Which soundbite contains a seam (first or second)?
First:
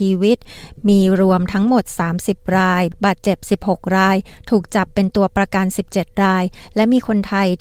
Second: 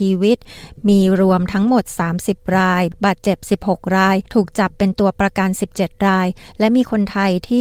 second